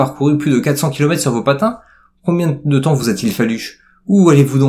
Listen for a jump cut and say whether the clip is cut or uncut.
uncut